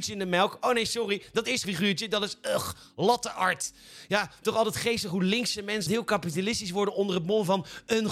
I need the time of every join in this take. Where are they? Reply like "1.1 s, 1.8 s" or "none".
1.6 s, 5.9 s